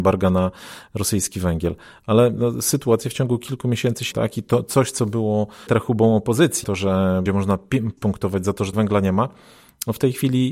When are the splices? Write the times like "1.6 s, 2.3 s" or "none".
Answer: 2.4 s, 4.1 s, 5.7 s, 6.6 s, 7.3 s, 8.0 s, 8.7 s